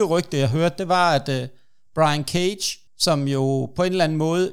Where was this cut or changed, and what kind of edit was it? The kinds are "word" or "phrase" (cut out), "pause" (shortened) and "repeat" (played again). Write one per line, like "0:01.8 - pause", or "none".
0:02.9 - pause